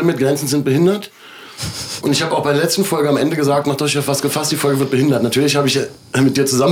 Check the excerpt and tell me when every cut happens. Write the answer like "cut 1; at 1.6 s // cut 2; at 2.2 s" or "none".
none